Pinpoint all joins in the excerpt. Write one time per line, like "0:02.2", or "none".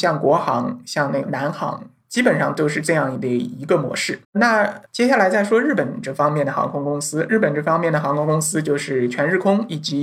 0:04.2